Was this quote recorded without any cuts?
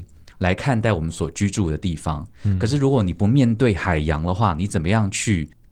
yes; 0 cuts

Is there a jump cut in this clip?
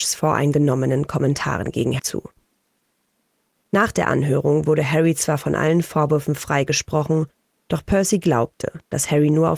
yes; 1 cut; at 2.0 s

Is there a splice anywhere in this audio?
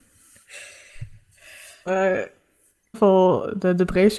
yes; 2 cuts; at 1.9 s, 2.9 s

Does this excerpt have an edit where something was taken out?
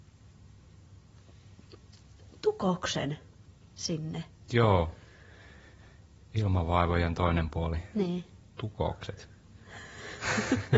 no; 0 cuts

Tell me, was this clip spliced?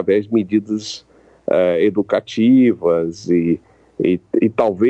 no; 0 cuts

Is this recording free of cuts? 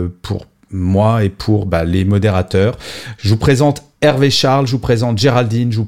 yes; 0 cuts

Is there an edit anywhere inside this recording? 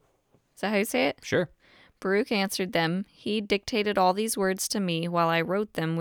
no; 0 cuts

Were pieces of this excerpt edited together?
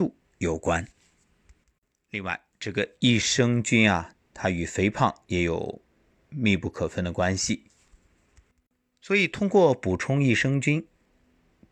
no; 0 cuts

